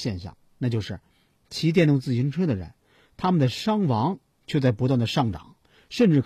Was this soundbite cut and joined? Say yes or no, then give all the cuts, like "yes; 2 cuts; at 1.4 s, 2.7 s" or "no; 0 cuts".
no; 0 cuts